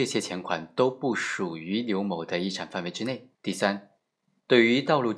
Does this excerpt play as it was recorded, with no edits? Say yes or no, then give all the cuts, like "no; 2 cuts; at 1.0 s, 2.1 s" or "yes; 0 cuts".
no; 1 cut; at 3.3 s